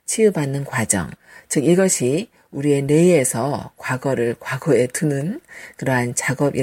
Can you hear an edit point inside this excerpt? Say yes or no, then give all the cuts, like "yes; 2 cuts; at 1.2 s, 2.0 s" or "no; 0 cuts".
no; 0 cuts